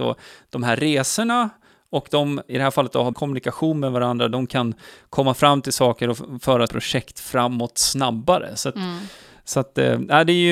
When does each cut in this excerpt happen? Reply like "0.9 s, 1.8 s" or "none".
2.5 s, 3.1 s, 6.7 s